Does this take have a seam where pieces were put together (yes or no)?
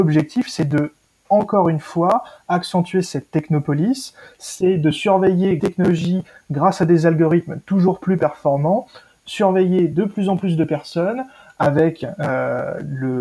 yes